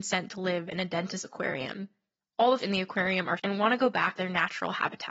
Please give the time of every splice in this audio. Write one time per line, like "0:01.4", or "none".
0:01.2
0:02.6
0:03.4
0:04.2